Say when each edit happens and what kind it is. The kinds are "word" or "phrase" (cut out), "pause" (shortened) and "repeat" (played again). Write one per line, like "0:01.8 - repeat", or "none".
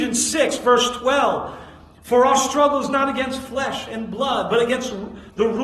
none

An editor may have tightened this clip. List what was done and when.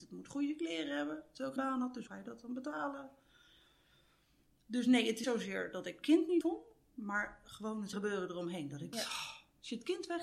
0:01.6 - word
0:02.1 - word
0:05.2 - word
0:06.0 - word
0:06.4 - word
0:07.9 - word
0:08.9 - word

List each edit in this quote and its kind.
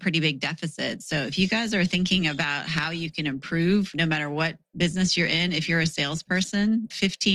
none

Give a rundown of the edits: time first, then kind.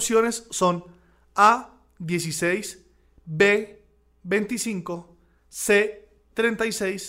none

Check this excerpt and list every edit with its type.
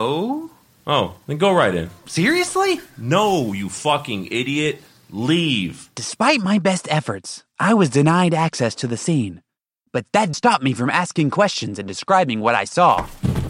0:10.3 - word

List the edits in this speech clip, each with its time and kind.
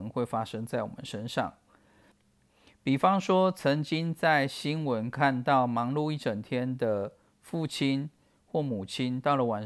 none

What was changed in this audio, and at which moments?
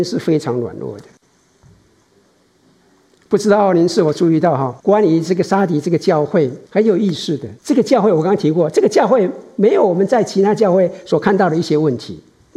0:04.8 - pause
0:06.7 - pause
0:07.6 - pause

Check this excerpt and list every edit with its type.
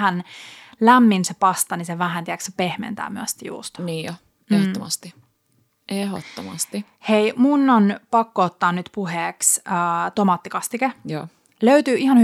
none

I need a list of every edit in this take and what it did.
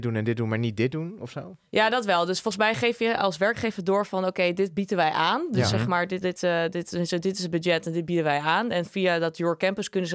0:06.2 - word

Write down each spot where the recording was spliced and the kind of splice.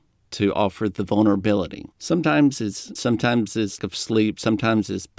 0:01.9 - pause
0:03.0 - word
0:03.8 - word

